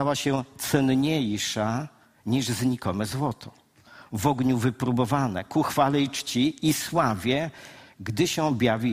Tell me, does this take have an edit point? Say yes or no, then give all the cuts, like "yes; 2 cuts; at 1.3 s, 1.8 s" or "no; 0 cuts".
no; 0 cuts